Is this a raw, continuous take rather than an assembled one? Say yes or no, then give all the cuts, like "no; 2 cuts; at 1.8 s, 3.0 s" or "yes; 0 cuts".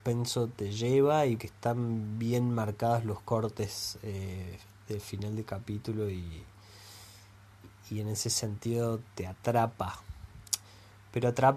no; 2 cuts; at 1.4 s, 9.1 s